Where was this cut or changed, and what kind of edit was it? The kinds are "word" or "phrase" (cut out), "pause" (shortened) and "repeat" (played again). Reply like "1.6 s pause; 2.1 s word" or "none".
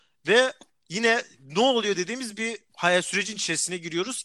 none